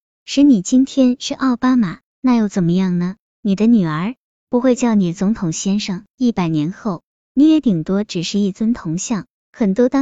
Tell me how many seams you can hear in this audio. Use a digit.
1